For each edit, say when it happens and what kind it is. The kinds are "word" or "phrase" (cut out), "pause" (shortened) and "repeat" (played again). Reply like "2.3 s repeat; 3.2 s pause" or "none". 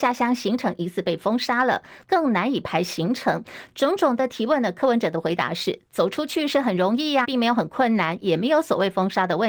7.2 s word